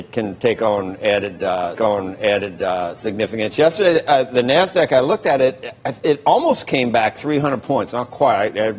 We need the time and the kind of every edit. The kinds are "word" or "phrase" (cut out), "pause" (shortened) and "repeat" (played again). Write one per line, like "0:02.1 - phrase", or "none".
0:01.8 - repeat